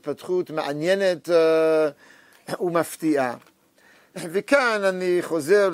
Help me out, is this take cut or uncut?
uncut